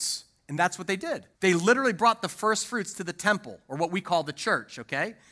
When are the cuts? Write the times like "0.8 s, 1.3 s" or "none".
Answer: 1.3 s